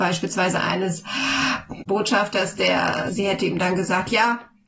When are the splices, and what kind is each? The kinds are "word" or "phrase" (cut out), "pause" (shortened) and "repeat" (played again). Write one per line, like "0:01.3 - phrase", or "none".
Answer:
0:01.9 - word
0:03.1 - word

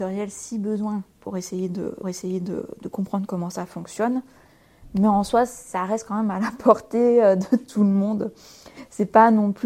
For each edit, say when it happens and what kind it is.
0:02.0 - repeat

